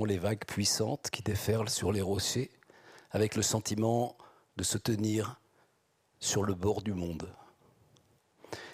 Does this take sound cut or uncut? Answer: uncut